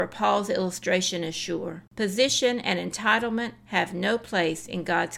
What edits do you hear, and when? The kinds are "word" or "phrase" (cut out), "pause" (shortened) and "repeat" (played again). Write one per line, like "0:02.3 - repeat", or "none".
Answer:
0:01.9 - pause